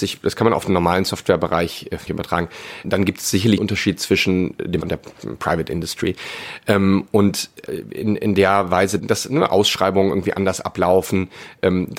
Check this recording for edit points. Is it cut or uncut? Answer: cut